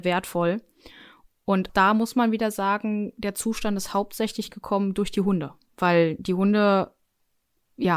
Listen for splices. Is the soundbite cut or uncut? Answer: cut